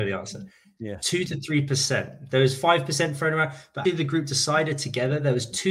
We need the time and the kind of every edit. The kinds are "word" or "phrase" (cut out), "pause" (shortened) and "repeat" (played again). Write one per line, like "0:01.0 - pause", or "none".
0:03.8 - word